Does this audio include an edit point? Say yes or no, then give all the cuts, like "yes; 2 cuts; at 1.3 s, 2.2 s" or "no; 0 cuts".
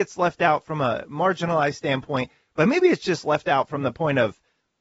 no; 0 cuts